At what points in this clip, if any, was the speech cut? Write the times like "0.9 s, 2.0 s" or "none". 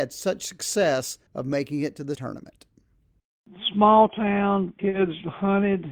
1.3 s, 2.1 s, 4.8 s

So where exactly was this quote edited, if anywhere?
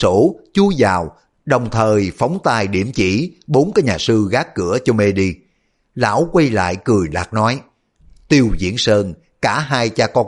none

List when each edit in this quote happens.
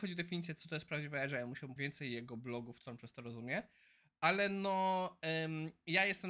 1.8 s

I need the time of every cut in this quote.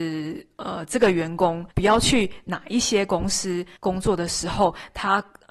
1.7 s, 3.8 s

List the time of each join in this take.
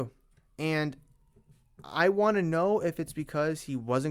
none

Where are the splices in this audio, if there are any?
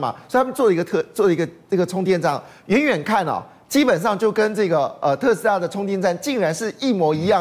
none

